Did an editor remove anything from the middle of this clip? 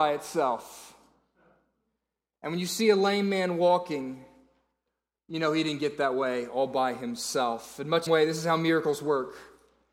yes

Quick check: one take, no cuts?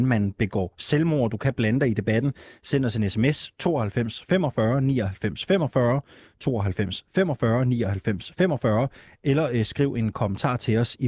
yes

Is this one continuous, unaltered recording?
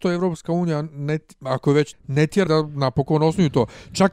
no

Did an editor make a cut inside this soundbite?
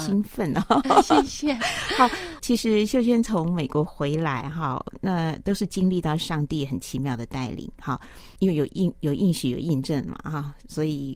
yes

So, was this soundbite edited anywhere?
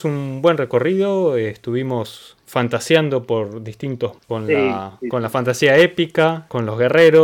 yes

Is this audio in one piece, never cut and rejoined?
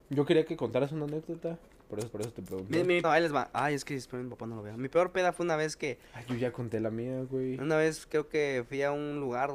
no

